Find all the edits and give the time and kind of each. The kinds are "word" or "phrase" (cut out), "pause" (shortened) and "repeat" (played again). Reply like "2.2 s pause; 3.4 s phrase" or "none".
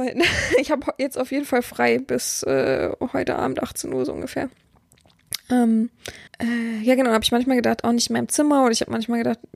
6.3 s pause